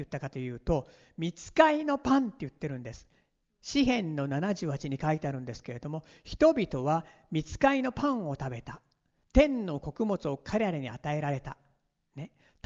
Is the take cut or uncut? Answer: uncut